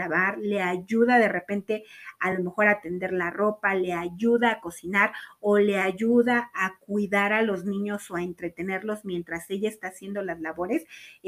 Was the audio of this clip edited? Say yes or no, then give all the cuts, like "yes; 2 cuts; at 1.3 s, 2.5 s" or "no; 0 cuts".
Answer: no; 0 cuts